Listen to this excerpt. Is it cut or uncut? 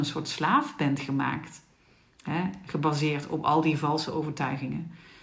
uncut